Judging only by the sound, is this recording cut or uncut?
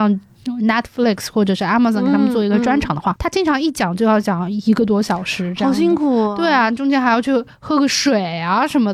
uncut